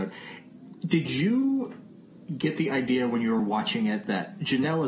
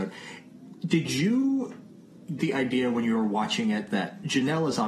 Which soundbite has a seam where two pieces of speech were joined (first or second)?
second